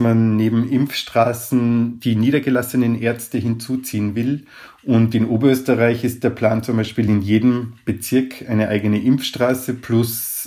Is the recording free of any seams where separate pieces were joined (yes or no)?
yes